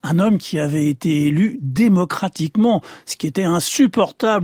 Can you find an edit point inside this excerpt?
no; 0 cuts

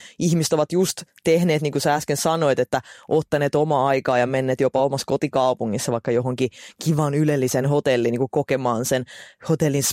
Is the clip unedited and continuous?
yes; 0 cuts

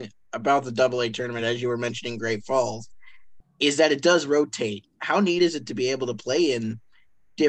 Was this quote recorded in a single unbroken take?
yes; 0 cuts

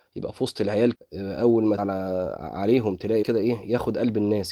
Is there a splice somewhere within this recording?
yes; 3 cuts; at 0.9 s, 1.8 s, 3.2 s

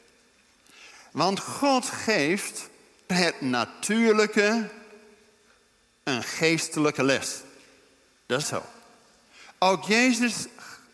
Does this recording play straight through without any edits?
no; 2 cuts; at 3.1 s, 8.4 s

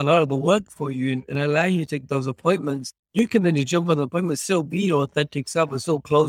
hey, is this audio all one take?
no; 2 cuts; at 2.1 s, 3.0 s

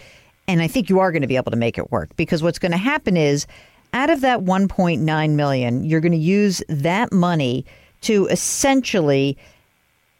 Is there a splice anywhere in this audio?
no; 0 cuts

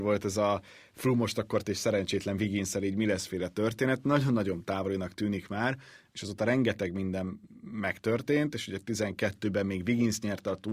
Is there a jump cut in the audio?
yes; 1 cut; at 1.6 s

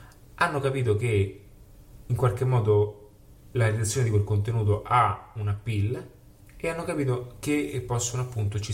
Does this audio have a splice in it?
no; 0 cuts

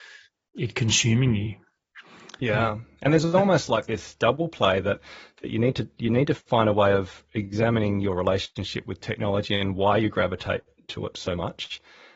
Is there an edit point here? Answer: no; 0 cuts

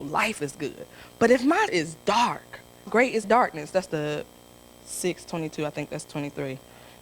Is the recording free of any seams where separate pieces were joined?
no; 4 cuts; at 1.7 s, 2.9 s, 3.2 s, 3.9 s

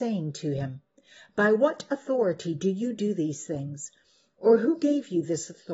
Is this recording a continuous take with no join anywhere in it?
yes; 0 cuts

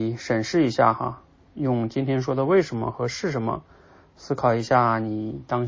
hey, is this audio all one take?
yes; 0 cuts

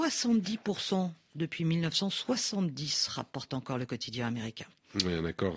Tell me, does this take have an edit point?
no; 0 cuts

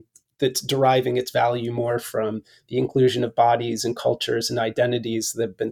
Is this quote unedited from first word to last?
yes; 0 cuts

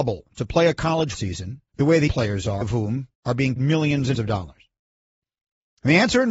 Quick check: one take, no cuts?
no; 7 cuts; at 1.1 s, 1.7 s, 2.1 s, 2.6 s, 3.1 s, 3.6 s, 4.1 s

